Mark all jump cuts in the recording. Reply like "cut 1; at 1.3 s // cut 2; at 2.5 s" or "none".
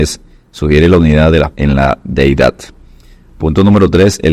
cut 1; at 1.5 s